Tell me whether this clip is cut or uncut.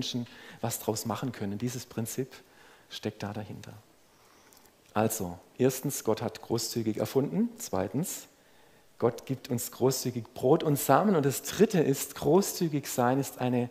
uncut